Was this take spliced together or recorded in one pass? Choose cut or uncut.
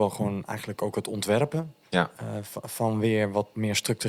uncut